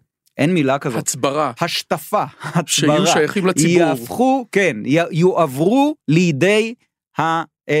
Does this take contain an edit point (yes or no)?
no